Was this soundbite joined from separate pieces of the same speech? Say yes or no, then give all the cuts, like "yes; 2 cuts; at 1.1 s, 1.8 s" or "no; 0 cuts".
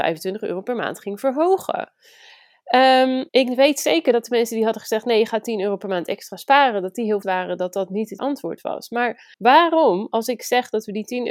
yes; 4 cuts; at 3.3 s, 7.2 s, 8.2 s, 9.3 s